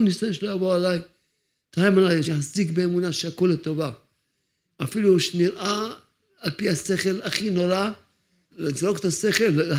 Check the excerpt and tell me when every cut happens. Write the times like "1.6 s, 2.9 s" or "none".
2.2 s, 8.5 s